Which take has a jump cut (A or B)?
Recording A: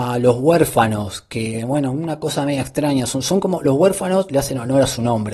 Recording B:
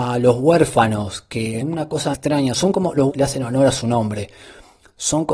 B